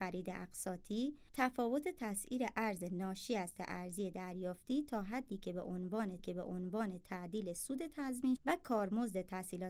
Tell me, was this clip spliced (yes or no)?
yes